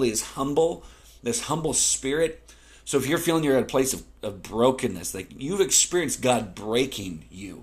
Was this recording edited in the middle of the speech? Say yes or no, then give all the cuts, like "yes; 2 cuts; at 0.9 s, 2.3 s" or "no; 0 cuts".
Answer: no; 0 cuts